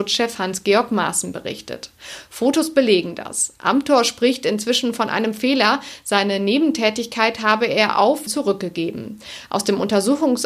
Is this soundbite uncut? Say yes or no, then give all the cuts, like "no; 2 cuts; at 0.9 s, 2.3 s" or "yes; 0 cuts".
no; 1 cut; at 8.3 s